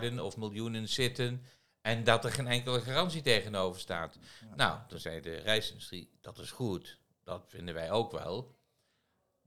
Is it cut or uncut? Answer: uncut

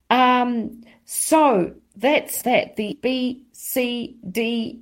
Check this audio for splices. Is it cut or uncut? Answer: cut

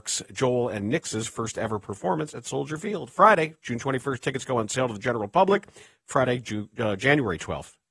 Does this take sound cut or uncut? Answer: uncut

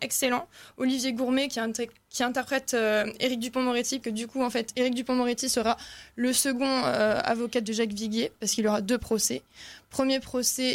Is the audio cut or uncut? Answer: cut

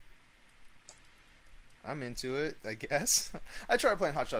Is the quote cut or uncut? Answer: cut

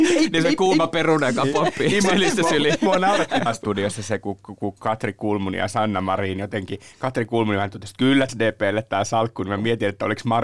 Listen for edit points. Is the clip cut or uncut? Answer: cut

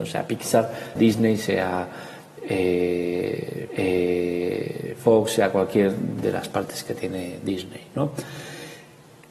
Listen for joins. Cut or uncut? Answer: cut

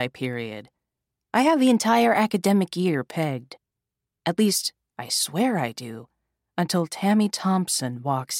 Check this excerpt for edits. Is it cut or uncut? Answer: uncut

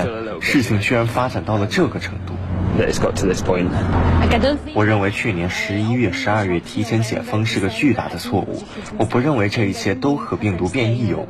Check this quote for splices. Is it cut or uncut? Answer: uncut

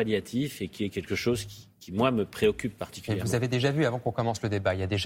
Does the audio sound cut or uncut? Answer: uncut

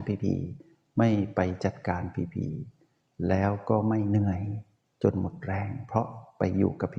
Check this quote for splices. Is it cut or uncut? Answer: uncut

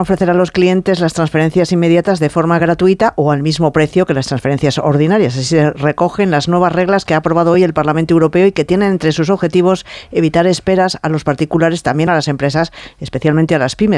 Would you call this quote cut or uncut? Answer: uncut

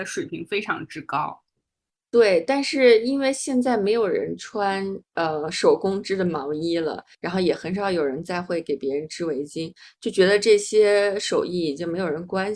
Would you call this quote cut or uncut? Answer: cut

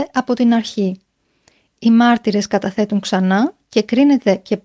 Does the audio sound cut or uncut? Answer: uncut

